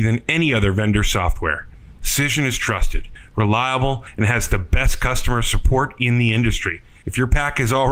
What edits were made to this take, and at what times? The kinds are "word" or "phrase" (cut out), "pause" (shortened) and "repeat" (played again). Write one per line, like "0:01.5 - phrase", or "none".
none